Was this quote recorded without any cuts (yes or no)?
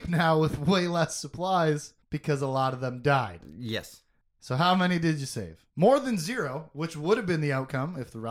no